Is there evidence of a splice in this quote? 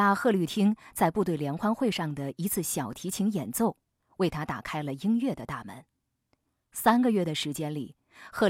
no; 0 cuts

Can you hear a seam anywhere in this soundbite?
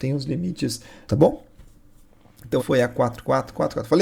yes; 2 cuts; at 1.1 s, 2.6 s

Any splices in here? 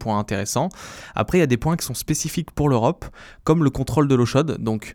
no; 0 cuts

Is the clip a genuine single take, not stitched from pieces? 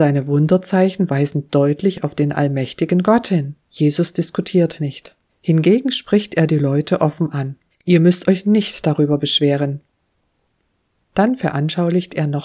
no; 3 cuts; at 3.6 s, 5.3 s, 7.7 s

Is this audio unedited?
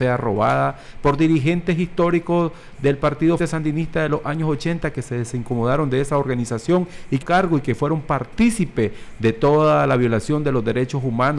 no; 2 cuts; at 3.4 s, 7.2 s

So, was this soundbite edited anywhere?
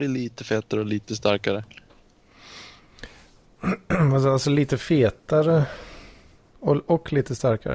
no; 0 cuts

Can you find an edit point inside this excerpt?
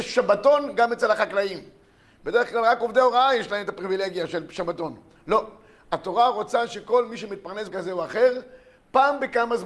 yes; 1 cut; at 7.7 s

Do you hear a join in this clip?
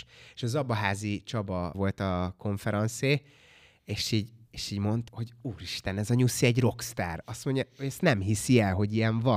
yes; 3 cuts; at 1.7 s, 4.4 s, 5.1 s

